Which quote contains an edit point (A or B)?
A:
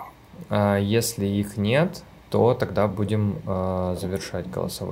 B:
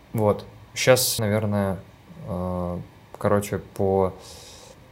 B